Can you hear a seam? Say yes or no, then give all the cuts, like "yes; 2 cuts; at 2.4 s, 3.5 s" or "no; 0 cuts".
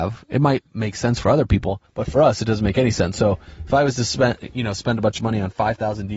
yes; 1 cut; at 1.9 s